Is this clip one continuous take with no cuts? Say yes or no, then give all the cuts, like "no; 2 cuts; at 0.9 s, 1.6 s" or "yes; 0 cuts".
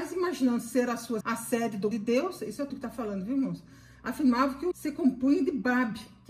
no; 4 cuts; at 1.2 s, 1.9 s, 2.7 s, 4.7 s